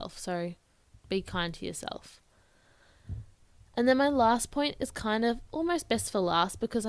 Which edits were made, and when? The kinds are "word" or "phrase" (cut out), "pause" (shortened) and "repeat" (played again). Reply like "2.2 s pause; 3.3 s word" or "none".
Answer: none